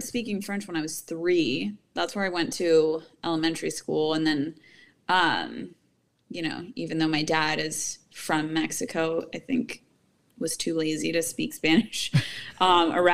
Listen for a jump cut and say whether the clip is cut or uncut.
uncut